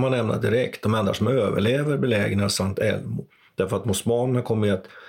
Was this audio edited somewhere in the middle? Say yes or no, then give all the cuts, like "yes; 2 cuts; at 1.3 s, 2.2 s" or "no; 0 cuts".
no; 0 cuts